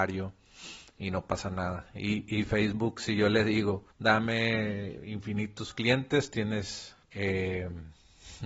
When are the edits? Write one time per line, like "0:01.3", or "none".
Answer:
0:03.9
0:07.0